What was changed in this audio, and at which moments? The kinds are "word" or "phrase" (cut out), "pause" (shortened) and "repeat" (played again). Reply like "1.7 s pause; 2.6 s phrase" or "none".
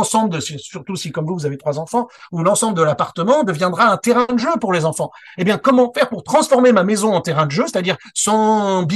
none